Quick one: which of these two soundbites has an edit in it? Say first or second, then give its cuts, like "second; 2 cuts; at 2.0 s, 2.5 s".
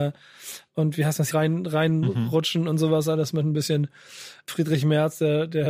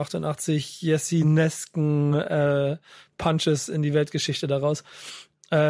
first; 2 cuts; at 1.3 s, 4.5 s